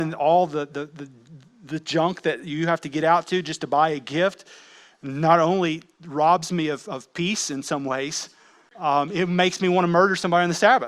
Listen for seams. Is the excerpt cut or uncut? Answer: uncut